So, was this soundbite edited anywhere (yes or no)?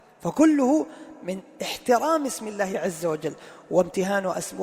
no